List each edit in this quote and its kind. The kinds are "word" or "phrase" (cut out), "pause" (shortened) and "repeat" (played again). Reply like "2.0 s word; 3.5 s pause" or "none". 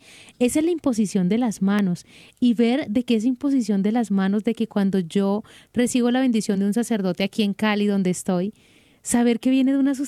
none